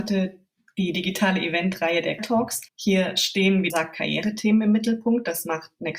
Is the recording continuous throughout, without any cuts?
no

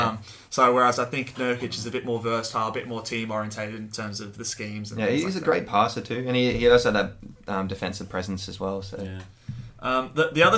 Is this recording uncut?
yes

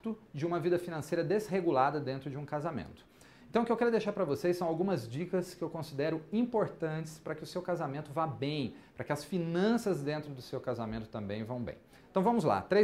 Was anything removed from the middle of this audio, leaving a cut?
no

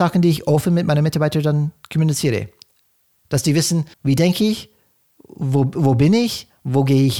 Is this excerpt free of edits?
no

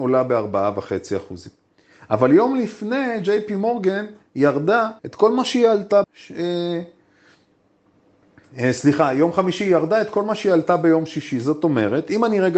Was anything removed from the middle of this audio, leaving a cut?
yes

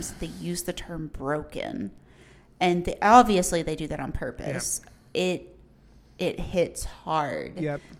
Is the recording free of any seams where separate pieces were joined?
yes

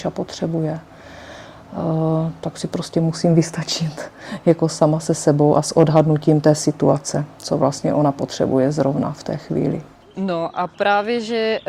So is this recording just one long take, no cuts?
yes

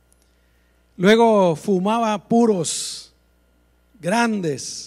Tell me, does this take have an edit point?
no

